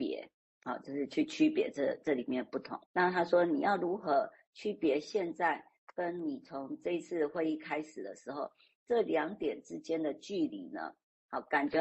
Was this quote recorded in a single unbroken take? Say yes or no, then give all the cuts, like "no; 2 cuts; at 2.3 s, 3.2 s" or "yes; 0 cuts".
no; 1 cut; at 2.9 s